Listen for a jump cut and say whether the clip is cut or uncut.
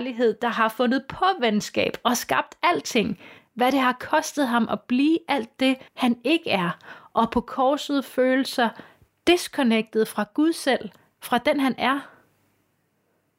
cut